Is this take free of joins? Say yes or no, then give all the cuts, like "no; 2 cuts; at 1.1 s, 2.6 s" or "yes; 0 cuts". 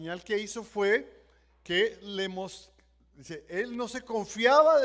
yes; 0 cuts